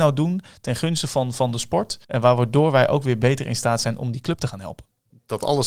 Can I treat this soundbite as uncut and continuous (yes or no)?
no